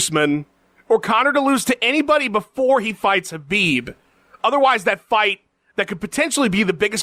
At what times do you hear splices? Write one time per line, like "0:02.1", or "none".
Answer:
none